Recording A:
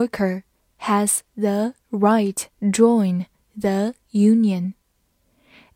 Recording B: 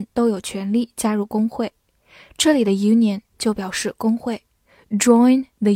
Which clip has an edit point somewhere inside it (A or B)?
A